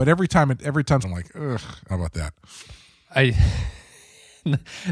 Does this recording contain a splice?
yes; 2 cuts; at 1.0 s, 1.9 s

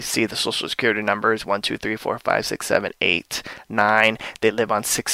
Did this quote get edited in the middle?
no; 0 cuts

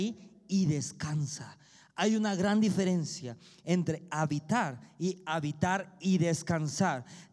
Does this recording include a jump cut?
no; 0 cuts

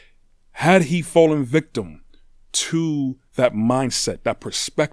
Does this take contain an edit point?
no; 0 cuts

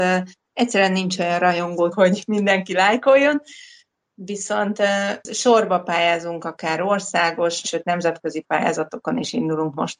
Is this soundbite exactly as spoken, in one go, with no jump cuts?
no; 3 cuts; at 1.9 s, 5.2 s, 7.6 s

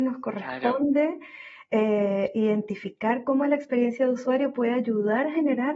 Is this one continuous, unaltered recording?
yes; 0 cuts

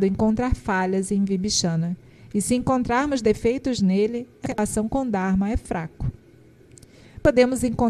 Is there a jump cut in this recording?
yes; 1 cut; at 4.5 s

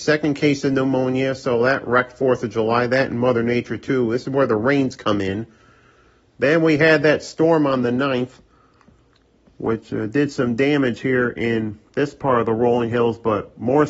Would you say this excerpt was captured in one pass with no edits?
yes; 0 cuts

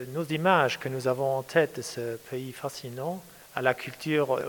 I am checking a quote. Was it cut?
no; 0 cuts

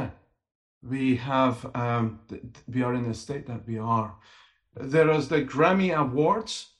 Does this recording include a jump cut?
no; 0 cuts

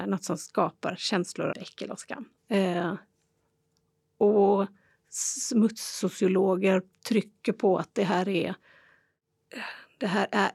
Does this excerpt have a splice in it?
yes; 2 cuts; at 1.5 s, 2.4 s

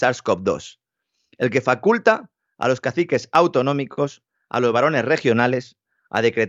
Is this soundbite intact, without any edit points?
yes; 0 cuts

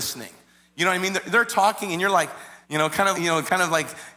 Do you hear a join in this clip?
yes; 2 cuts; at 2.6 s, 3.1 s

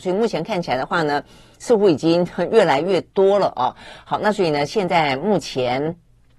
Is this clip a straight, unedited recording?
yes; 0 cuts

